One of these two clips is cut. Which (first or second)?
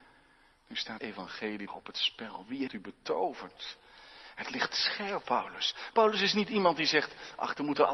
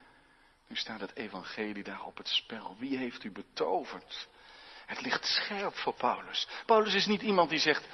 first